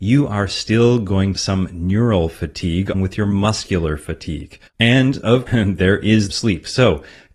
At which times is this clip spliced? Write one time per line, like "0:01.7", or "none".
0:01.3
0:02.9
0:04.7
0:05.5
0:06.3